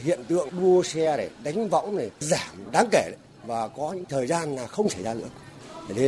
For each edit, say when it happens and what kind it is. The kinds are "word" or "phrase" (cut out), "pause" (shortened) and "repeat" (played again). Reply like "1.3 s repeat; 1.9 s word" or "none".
none